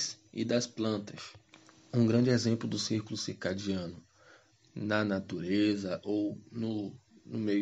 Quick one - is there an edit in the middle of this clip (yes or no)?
no